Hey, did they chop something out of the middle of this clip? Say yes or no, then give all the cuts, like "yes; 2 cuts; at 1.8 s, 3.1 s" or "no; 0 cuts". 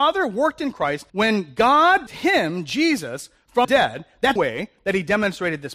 yes; 4 cuts; at 1.1 s, 2.1 s, 3.6 s, 4.4 s